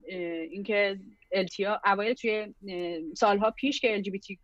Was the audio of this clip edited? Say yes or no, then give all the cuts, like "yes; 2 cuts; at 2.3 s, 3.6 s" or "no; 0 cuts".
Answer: yes; 2 cuts; at 1.5 s, 2.2 s